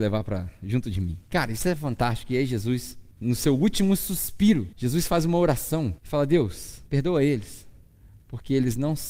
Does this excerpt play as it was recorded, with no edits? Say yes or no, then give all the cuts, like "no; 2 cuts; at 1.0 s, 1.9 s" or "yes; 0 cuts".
no; 5 cuts; at 1.3 s, 3.1 s, 4.7 s, 6.0 s, 6.9 s